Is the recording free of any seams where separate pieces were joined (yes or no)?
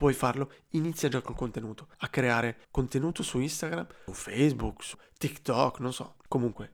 no